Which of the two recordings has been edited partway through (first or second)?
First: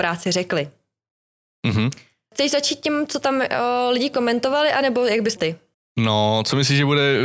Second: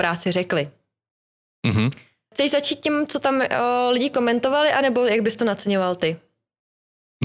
first